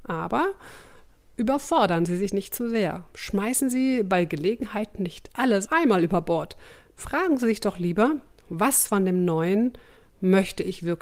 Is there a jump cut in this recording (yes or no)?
yes